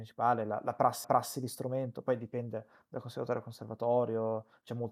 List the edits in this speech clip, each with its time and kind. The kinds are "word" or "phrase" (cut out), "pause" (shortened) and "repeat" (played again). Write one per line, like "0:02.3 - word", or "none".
0:01.0 - repeat

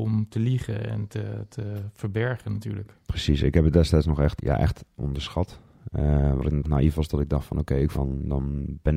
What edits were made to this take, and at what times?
0:04.4 - word
0:06.6 - phrase
0:07.9 - phrase

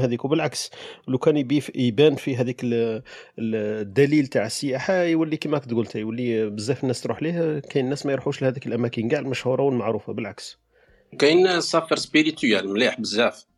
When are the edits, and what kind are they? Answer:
none

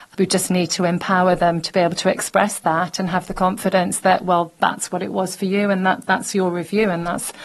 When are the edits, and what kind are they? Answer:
none

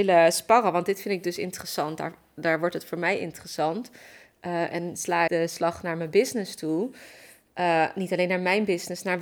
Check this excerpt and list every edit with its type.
0:05.3 - word

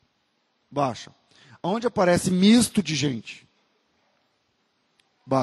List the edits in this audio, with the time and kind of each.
none

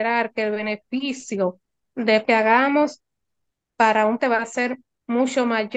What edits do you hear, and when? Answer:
0:02.2 - phrase
0:04.2 - word

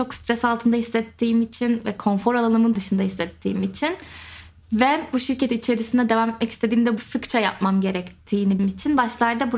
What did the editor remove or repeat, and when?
0:02.8 - word
0:07.0 - word
0:08.6 - word

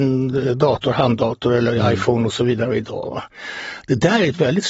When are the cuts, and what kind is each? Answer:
none

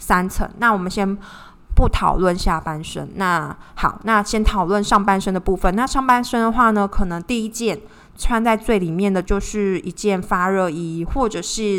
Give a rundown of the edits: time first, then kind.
none

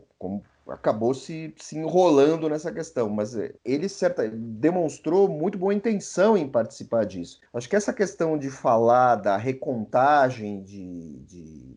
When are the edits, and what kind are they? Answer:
0:03.6 - pause
0:07.5 - pause

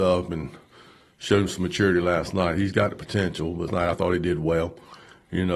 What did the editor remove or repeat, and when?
0:03.7 - word

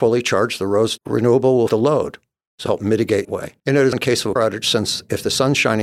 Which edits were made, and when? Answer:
0:01.0 - word
0:01.7 - word
0:02.7 - word
0:03.2 - phrase
0:03.6 - pause
0:03.9 - word
0:04.4 - word

